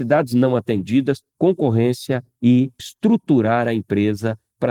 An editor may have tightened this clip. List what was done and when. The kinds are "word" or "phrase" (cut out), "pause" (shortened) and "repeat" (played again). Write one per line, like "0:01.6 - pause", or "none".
0:02.8 - word